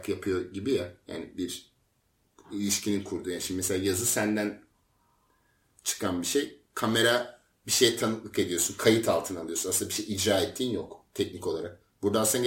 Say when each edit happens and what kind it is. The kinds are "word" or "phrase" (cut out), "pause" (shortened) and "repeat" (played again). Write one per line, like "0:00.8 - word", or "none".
none